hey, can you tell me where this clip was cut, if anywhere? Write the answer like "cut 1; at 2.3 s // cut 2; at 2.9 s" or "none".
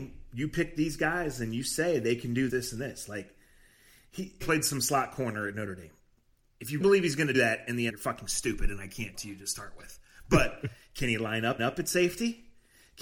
cut 1; at 2.5 s // cut 2; at 4.4 s // cut 3; at 6.8 s // cut 4; at 7.3 s // cut 5; at 7.9 s // cut 6; at 9.1 s // cut 7; at 11.6 s